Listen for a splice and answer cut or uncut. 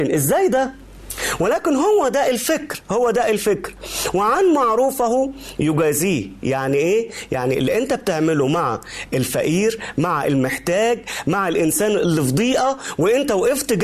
uncut